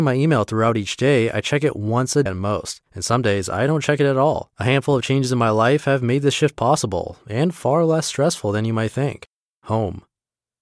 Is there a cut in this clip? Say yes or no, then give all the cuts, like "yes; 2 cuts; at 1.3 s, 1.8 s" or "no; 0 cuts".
yes; 4 cuts; at 2.3 s, 2.9 s, 4.5 s, 9.5 s